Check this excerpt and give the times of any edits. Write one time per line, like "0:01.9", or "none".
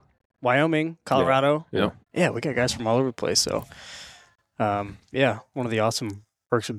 0:02.0